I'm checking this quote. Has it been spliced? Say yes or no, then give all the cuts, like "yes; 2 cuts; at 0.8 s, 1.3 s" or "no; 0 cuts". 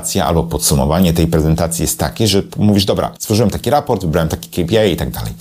yes; 1 cut; at 3.2 s